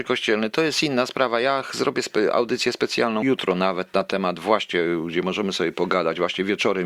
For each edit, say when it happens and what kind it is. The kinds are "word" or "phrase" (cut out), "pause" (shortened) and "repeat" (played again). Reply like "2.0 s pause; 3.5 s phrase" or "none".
3.2 s word